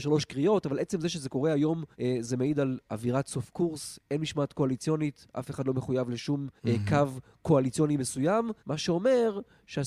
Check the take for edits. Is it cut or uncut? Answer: cut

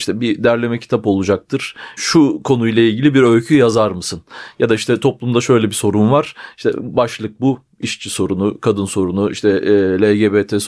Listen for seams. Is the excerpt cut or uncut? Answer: cut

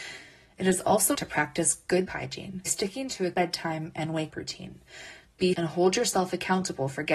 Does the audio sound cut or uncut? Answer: cut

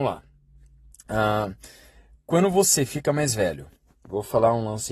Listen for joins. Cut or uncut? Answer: uncut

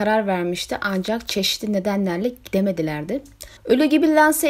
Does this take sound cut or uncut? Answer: cut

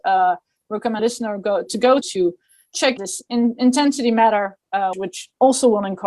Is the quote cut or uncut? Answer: cut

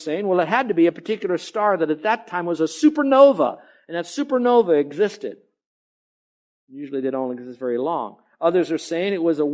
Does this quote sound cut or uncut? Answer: uncut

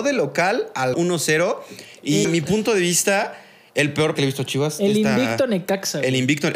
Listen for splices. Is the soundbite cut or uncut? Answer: cut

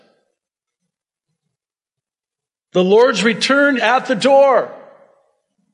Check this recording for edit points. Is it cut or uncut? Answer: cut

